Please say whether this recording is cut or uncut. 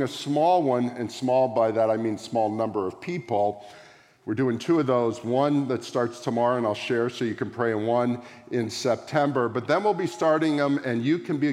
uncut